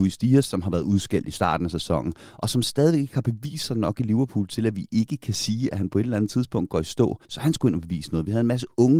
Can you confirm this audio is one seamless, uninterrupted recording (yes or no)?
no